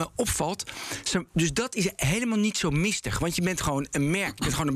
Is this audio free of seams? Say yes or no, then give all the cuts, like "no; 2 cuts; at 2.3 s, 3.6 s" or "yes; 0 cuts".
yes; 0 cuts